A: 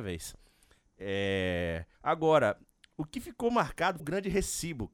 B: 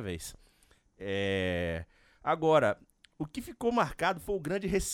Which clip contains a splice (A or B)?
A